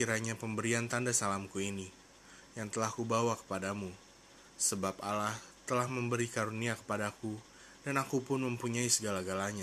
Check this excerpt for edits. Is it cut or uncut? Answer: uncut